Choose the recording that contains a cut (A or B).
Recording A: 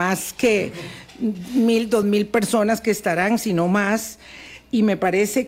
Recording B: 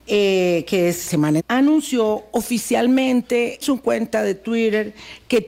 B